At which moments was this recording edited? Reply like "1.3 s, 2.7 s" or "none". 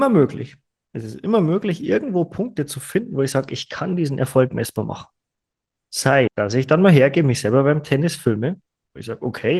6.3 s